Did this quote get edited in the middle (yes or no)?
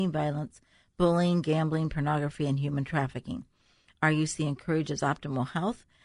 no